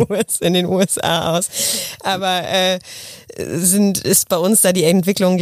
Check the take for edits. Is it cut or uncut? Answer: uncut